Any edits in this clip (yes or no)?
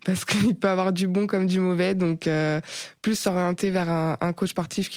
no